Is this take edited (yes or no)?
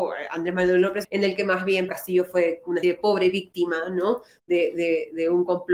yes